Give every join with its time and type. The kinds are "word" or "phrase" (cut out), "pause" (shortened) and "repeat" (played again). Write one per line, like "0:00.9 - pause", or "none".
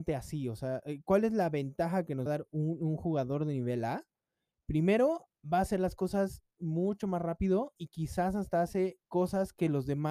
0:02.3 - word
0:05.4 - pause
0:07.8 - word
0:09.0 - pause